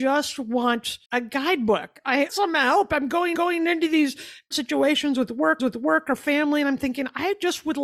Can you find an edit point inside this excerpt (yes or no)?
yes